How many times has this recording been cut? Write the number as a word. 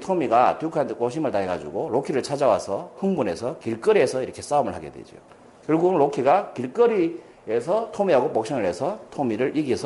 one